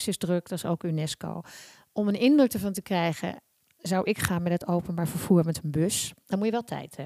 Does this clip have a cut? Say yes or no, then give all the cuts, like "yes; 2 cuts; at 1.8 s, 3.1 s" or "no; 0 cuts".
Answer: no; 0 cuts